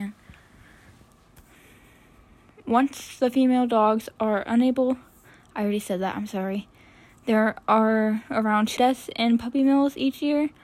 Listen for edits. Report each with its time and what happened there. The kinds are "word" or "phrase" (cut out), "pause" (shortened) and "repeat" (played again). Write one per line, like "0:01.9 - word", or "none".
0:08.8 - word